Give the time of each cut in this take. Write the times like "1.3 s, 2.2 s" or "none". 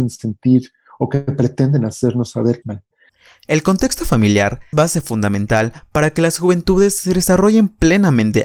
2.6 s, 4.7 s